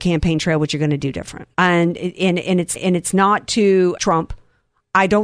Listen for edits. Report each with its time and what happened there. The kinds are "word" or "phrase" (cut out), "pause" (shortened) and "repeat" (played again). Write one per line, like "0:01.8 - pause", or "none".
0:01.5 - pause
0:02.8 - repeat
0:04.0 - word